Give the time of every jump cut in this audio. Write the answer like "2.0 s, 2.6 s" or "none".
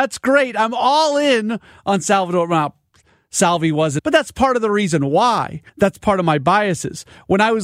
4.0 s, 5.7 s